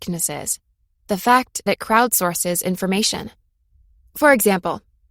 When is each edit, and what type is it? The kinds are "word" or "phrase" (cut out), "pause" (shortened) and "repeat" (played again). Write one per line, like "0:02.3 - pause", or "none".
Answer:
0:01.7 - word